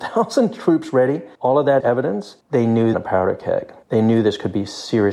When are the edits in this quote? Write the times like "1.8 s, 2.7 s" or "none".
1.3 s, 1.8 s, 2.4 s, 2.9 s, 3.8 s